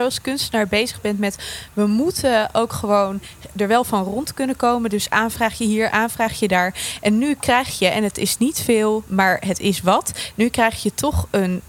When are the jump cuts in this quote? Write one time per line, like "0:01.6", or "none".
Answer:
0:03.5